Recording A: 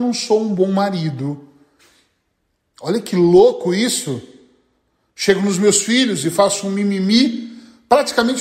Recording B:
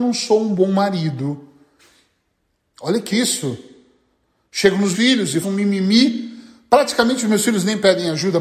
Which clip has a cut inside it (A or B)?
B